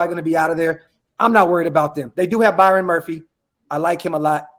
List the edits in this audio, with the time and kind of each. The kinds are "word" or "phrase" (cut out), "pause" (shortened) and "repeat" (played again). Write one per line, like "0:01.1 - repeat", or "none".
none